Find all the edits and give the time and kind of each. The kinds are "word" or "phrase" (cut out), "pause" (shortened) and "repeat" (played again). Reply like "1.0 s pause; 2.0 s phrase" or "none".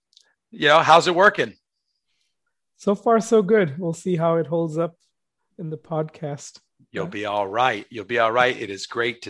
none